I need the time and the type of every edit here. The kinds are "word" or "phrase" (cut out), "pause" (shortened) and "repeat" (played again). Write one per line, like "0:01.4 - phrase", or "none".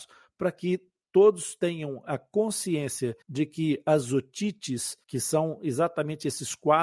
0:03.2 - pause
0:05.0 - pause